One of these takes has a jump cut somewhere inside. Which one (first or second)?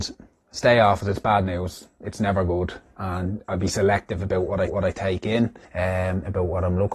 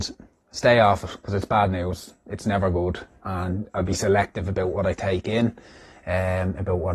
first